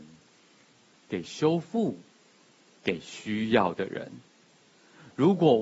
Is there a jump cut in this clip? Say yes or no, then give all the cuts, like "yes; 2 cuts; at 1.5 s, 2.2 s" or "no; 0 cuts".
no; 0 cuts